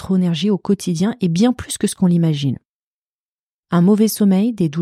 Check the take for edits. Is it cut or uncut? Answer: uncut